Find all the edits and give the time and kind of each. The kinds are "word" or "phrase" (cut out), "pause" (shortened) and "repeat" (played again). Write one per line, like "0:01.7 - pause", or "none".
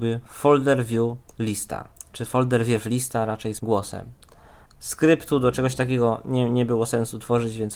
0:03.6 - phrase